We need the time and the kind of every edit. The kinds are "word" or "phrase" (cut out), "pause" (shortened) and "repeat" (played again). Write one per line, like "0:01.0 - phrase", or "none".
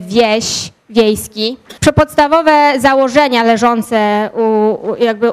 0:01.8 - pause